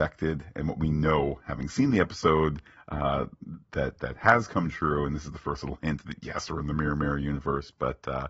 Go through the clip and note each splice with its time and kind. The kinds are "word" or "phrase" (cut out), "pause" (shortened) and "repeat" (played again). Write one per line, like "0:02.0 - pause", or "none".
none